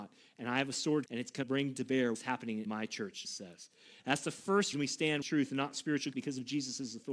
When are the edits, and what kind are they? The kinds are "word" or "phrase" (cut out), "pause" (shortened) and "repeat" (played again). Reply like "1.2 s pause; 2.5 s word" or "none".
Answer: 1.1 s word; 1.4 s word; 2.1 s word; 2.7 s word; 3.2 s word; 4.7 s word; 5.2 s word; 6.1 s word

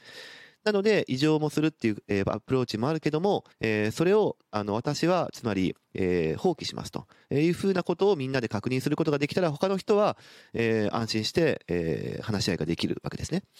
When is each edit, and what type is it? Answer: 3.5 s pause

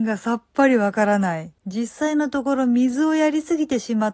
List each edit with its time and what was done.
1.6 s pause

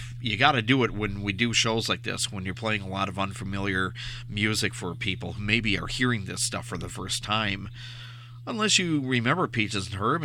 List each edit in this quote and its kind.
5.4 s word; 6.9 s word

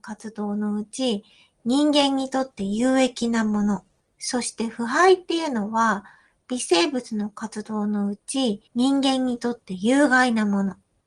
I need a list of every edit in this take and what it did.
8.7 s pause

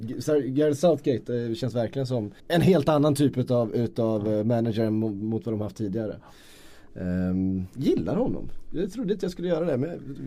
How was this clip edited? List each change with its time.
2.4 s pause

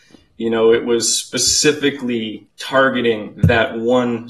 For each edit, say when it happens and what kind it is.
2.5 s pause

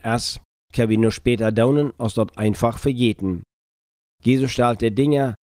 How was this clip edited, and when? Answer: none

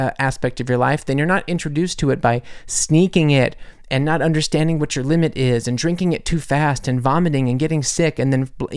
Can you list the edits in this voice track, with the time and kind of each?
none

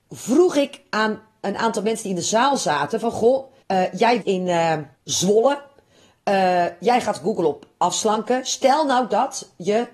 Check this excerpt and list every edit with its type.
3.6 s pause; 4.2 s word; 4.9 s pause

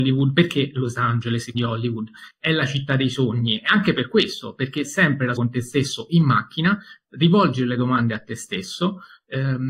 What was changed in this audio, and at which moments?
1.5 s word; 4.8 s word; 5.4 s word

